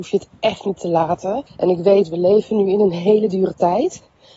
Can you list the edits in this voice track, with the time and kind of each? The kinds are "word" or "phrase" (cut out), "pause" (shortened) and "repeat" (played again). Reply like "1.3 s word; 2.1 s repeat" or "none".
1.5 s pause